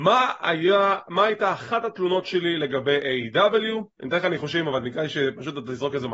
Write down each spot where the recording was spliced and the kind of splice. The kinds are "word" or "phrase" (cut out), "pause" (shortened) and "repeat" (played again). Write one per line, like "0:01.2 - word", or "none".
0:03.9 - pause